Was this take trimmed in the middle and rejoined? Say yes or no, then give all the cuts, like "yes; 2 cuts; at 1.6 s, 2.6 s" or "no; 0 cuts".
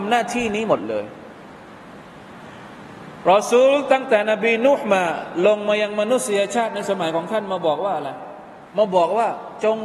yes; 1 cut; at 8.7 s